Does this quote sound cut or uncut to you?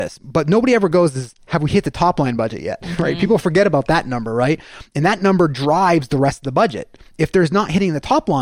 uncut